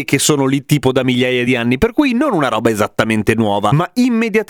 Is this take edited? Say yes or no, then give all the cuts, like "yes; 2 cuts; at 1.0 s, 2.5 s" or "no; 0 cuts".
no; 0 cuts